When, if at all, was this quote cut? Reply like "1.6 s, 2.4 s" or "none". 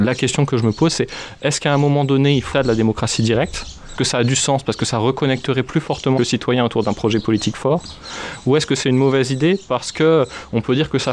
2.5 s, 4.0 s, 6.2 s